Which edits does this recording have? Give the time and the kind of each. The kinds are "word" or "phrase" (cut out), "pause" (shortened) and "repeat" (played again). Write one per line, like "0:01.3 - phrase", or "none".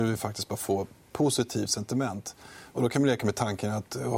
none

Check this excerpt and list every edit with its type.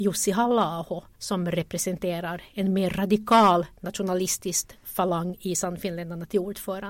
0:01.1 - pause
0:03.8 - pause

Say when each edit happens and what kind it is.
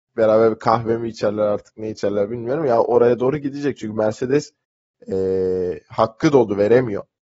none

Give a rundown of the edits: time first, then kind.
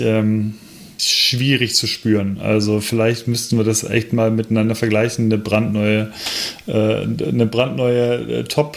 0:01.0 - word

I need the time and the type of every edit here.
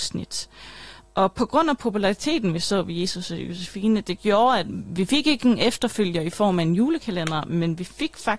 none

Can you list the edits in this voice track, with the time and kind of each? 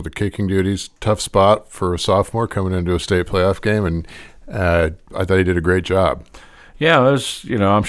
none

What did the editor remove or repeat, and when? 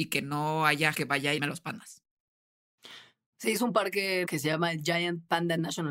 0:00.9 - word
0:01.4 - word
0:04.2 - word

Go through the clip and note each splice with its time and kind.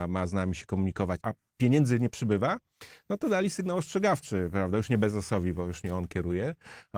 0:01.2 - phrase

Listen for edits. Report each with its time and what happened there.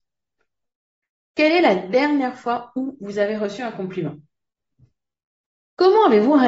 none

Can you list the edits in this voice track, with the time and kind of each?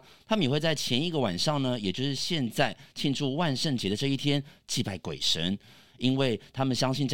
none

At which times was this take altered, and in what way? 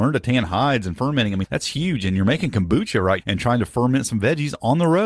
0:01.4 - word
0:03.2 - word

